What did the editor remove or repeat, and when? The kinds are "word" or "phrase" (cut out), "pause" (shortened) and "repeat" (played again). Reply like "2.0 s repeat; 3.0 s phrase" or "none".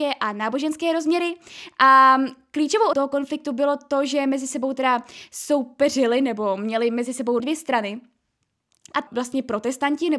2.9 s word; 7.4 s word; 9.1 s word